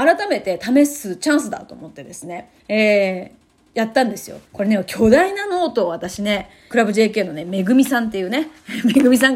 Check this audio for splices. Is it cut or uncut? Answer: cut